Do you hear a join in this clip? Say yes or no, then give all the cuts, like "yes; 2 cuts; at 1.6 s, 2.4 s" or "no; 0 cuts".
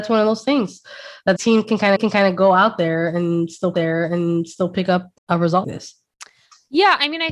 yes; 5 cuts; at 1.4 s, 2.0 s, 3.7 s, 5.2 s, 5.6 s